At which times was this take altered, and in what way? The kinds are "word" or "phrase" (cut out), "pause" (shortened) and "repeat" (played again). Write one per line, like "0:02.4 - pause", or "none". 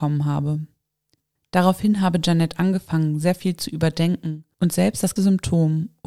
0:05.2 - word